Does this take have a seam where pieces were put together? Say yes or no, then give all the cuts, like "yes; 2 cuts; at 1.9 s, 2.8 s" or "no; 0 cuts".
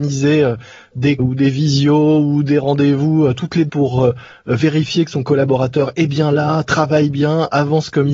yes; 2 cuts; at 1.2 s, 3.7 s